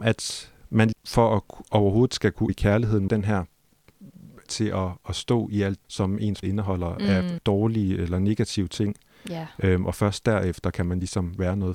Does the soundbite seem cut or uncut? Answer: cut